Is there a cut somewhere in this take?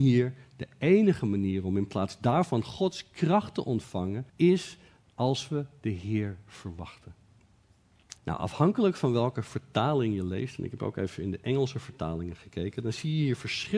yes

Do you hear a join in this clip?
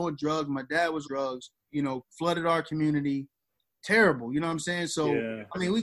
yes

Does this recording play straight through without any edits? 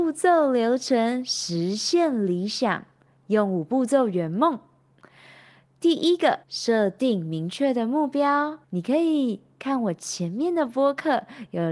no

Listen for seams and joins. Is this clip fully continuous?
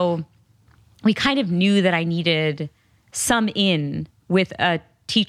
yes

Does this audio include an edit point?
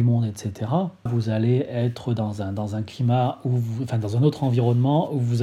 yes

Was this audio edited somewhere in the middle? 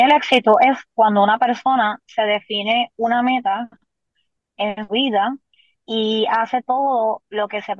yes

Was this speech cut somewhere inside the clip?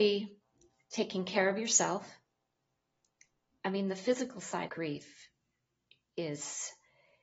yes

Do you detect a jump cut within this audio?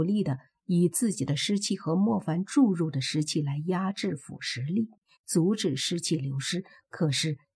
no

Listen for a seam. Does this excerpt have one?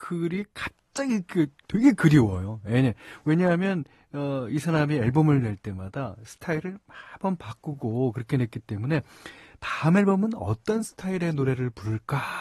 no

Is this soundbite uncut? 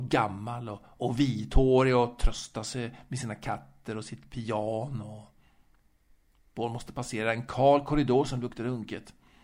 no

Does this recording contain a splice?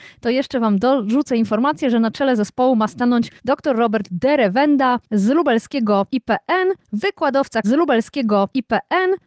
yes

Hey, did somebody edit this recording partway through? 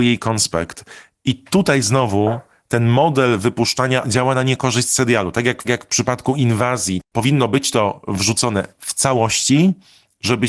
yes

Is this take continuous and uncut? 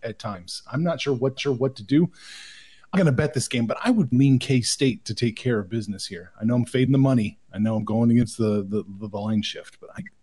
no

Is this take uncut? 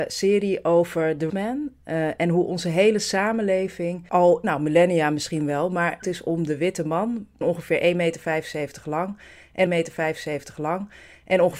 no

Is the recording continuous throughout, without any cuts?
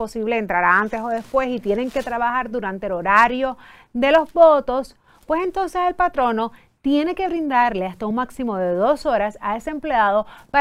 yes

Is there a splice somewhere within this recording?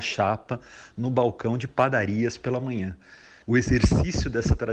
no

